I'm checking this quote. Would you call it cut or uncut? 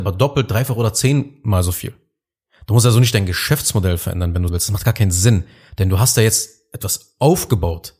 cut